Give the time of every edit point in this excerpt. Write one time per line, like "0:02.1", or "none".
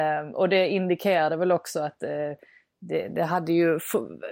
none